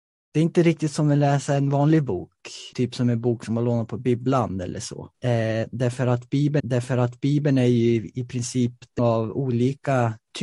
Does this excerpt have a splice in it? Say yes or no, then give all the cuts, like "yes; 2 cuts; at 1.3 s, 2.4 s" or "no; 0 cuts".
yes; 4 cuts; at 2.7 s, 5.1 s, 6.6 s, 9.0 s